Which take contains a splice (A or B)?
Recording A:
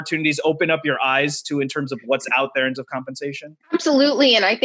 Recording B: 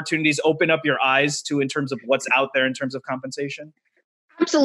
A